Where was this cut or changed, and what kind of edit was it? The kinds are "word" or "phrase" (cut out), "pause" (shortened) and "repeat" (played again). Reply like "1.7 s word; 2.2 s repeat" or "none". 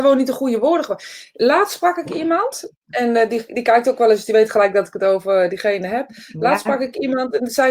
none